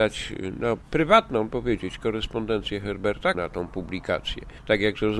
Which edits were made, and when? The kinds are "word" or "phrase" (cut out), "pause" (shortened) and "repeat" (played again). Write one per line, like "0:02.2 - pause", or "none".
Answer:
0:01.5 - phrase
0:03.3 - phrase